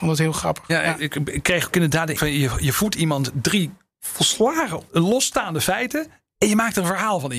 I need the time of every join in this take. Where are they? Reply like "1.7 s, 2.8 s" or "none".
2.1 s, 4.9 s